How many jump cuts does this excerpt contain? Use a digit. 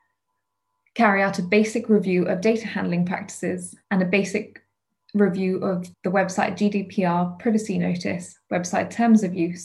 2